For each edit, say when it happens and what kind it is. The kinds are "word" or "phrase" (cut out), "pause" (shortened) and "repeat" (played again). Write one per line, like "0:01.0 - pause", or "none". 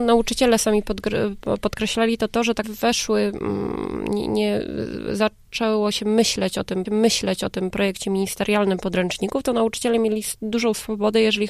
0:02.6 - phrase
0:06.9 - repeat

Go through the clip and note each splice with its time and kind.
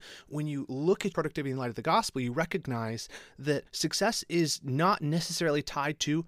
0:01.1 - word
0:03.7 - pause

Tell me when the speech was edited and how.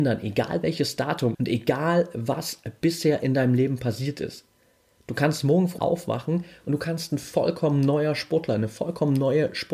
0:01.3 - word
0:05.8 - word

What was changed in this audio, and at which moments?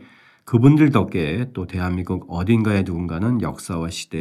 none

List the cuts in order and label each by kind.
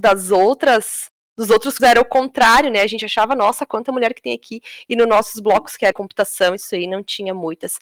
0:01.8 - word
0:05.9 - word

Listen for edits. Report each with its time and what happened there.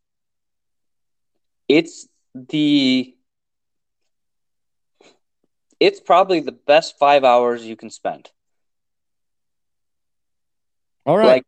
none

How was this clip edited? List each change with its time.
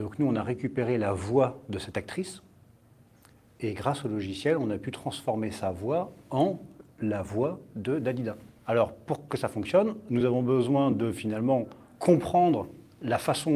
none

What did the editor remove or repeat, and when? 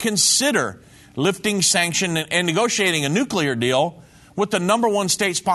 none

